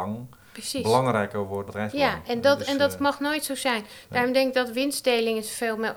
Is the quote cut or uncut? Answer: cut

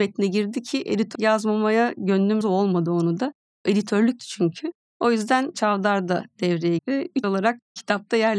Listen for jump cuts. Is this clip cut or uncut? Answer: cut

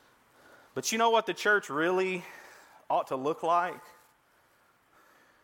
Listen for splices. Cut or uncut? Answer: uncut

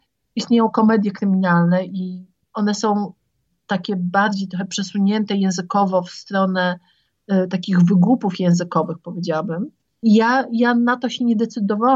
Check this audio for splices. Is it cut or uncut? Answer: uncut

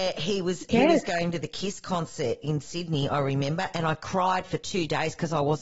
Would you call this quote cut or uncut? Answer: uncut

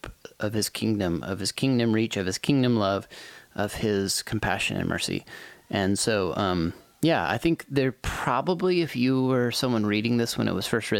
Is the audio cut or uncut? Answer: uncut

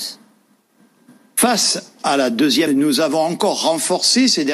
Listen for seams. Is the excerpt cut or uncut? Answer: cut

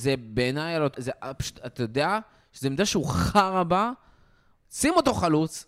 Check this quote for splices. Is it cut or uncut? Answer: cut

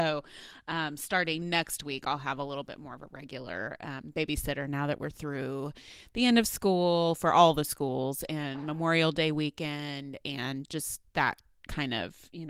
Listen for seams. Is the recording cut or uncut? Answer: uncut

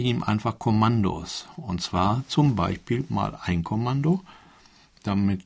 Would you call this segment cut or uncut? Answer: uncut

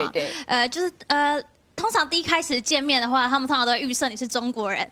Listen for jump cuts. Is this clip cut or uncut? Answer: uncut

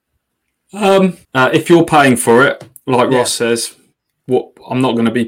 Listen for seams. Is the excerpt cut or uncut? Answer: cut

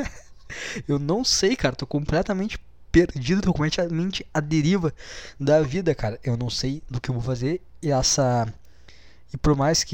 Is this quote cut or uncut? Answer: cut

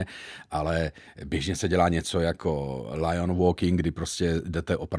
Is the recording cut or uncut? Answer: uncut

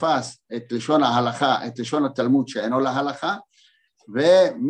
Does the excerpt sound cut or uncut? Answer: uncut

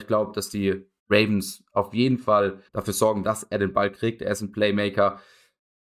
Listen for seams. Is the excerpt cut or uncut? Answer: cut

